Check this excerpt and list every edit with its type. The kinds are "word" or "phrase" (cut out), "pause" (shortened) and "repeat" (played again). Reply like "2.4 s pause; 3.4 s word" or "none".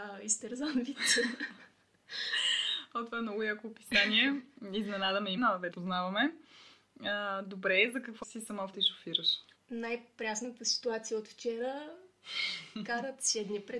5.4 s word; 5.7 s word; 8.2 s phrase; 8.7 s word; 9.6 s pause